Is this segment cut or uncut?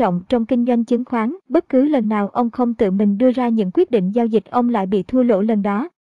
cut